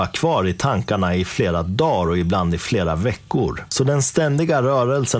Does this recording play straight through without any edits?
yes; 0 cuts

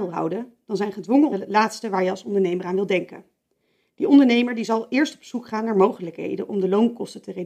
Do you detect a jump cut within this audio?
yes; 1 cut; at 1.3 s

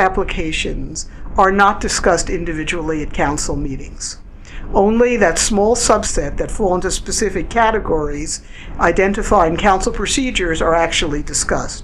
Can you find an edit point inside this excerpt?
no; 0 cuts

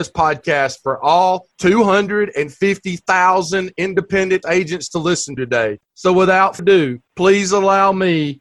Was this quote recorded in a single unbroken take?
no; 5 cuts; at 1.5 s, 4.4 s, 5.4 s, 6.6 s, 7.0 s

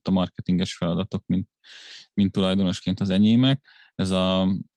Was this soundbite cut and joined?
no; 0 cuts

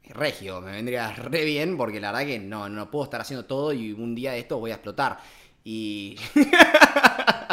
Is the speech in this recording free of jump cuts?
yes; 0 cuts

